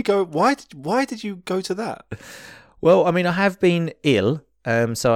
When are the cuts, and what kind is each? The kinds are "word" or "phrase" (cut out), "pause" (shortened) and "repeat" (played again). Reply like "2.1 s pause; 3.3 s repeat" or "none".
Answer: none